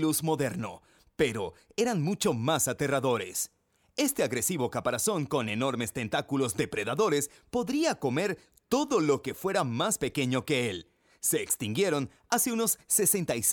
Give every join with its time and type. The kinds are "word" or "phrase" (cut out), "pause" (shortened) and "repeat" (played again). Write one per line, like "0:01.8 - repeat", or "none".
none